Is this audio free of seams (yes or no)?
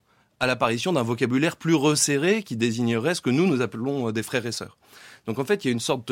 yes